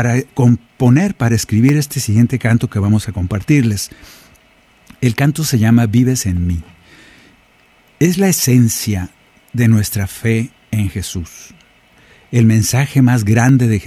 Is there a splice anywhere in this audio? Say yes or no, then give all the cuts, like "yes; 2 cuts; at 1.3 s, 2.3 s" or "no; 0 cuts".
no; 0 cuts